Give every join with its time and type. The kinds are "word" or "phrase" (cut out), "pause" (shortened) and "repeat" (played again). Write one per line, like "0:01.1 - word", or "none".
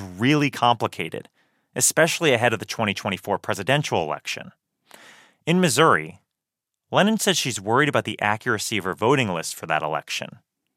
none